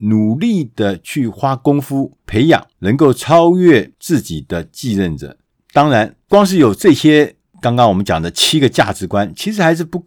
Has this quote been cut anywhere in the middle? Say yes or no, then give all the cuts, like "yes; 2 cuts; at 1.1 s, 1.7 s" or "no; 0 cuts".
yes; 3 cuts; at 2.2 s, 2.7 s, 5.6 s